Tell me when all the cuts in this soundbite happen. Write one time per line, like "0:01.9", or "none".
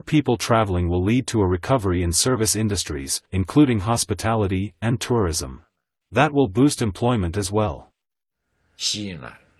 0:03.3